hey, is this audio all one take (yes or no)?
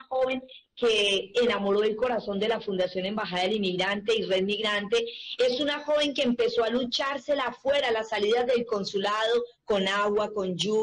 yes